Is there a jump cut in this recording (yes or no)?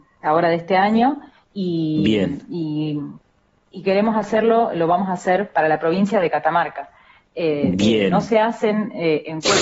yes